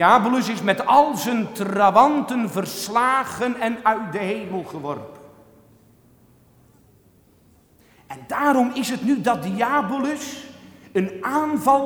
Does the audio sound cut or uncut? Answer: uncut